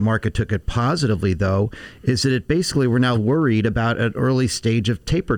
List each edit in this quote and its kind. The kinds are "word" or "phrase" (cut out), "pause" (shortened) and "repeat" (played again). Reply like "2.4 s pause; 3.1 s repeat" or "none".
3.1 s word